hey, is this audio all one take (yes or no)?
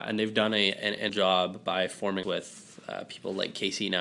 no